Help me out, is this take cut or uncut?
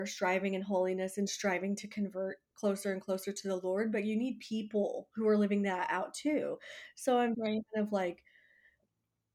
uncut